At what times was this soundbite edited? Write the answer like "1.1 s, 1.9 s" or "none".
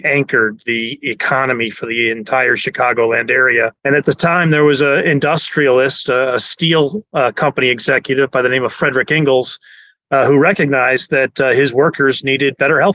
3.8 s